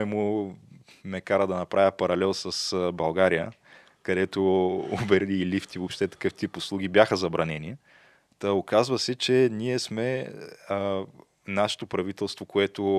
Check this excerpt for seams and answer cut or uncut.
uncut